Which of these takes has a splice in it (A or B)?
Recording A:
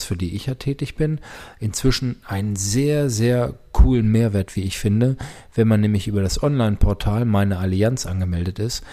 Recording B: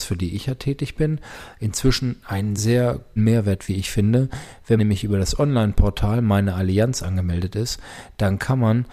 B